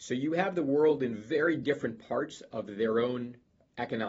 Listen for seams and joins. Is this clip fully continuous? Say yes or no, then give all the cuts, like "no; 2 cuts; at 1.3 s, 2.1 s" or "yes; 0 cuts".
yes; 0 cuts